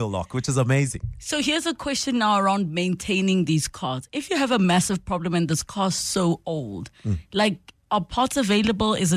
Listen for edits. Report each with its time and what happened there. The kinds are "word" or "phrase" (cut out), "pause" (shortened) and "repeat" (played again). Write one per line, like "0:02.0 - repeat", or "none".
none